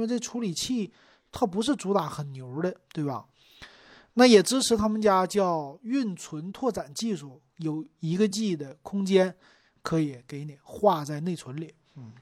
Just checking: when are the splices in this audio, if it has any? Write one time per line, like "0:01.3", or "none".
none